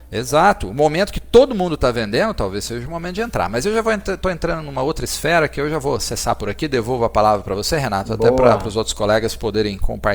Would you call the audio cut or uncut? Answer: uncut